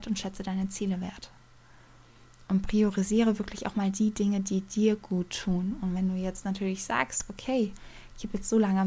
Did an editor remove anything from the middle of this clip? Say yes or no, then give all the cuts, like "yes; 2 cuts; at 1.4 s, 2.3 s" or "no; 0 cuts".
no; 0 cuts